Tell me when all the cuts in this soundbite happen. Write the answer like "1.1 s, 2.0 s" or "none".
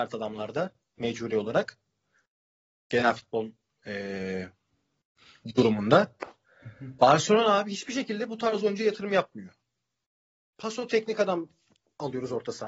none